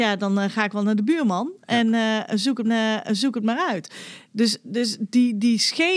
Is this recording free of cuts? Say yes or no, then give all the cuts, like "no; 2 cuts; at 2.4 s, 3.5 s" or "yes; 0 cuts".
no; 1 cut; at 2.6 s